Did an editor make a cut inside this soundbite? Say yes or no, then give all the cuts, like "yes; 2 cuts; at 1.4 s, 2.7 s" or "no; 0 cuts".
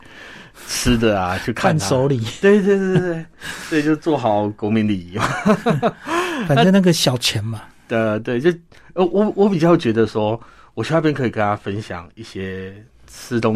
no; 0 cuts